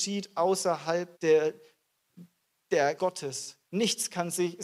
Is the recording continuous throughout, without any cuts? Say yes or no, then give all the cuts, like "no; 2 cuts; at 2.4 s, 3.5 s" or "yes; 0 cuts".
no; 3 cuts; at 1.1 s, 3.0 s, 3.7 s